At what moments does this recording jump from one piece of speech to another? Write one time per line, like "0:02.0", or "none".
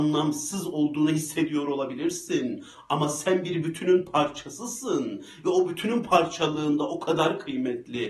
none